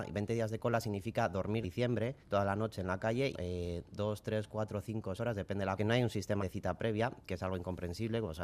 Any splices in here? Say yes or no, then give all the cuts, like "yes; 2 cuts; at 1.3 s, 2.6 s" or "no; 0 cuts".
yes; 6 cuts; at 1.6 s, 2.2 s, 3.3 s, 5.2 s, 5.8 s, 6.4 s